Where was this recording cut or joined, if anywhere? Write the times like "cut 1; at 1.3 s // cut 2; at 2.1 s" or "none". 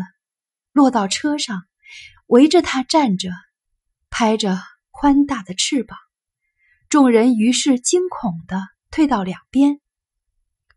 none